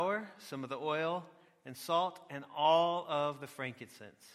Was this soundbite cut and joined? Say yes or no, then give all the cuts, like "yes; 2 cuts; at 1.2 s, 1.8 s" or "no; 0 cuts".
no; 0 cuts